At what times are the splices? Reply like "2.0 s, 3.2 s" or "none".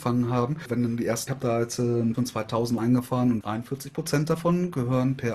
1.3 s, 2.1 s, 2.8 s, 3.4 s